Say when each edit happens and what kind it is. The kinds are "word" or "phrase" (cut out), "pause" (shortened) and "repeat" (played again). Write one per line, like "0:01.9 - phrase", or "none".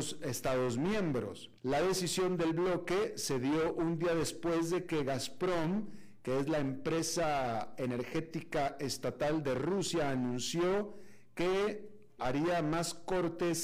0:01.6 - pause
0:12.2 - word